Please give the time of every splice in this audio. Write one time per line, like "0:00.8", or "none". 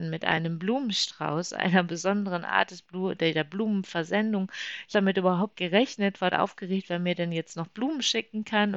0:04.9
0:05.5
0:06.3